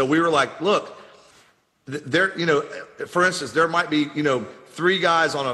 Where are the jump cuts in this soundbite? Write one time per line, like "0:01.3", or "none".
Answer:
none